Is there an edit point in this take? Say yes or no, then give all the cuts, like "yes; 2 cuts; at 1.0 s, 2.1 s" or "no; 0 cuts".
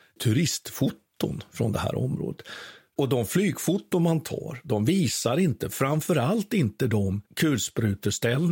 yes; 1 cut; at 7.3 s